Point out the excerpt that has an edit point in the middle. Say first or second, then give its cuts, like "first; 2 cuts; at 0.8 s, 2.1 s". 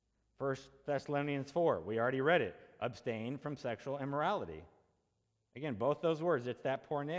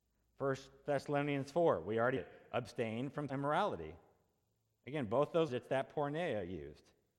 second; 3 cuts; at 2.2 s, 3.3 s, 5.5 s